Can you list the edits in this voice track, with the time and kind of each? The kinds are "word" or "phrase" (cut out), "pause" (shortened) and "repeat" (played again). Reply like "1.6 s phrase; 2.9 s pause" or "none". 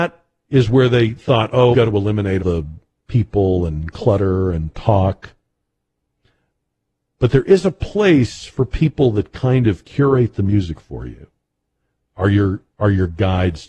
1.7 s word; 2.4 s word

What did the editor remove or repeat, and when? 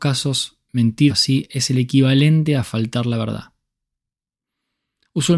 1.1 s word

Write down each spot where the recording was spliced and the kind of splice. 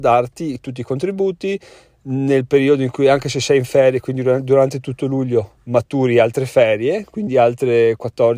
none

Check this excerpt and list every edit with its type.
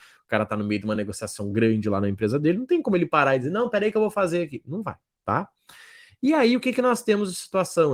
none

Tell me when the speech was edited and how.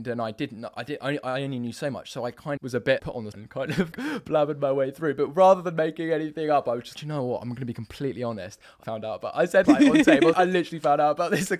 2.6 s word; 3.0 s word; 3.3 s word; 3.9 s word; 6.9 s word; 8.8 s word; 9.7 s word; 10.3 s word

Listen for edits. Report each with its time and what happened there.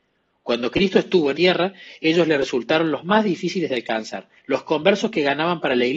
1.3 s word; 4.4 s pause

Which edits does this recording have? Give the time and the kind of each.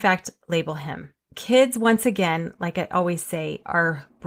1.2 s pause

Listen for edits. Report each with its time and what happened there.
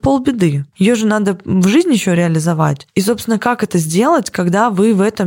none

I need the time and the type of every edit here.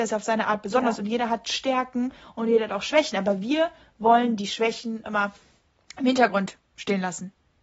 5.0 s word

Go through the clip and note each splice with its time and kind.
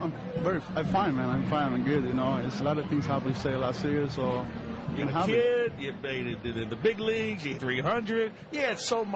2.6 s word; 3.2 s word; 5.0 s word; 6.4 s word; 7.5 s word

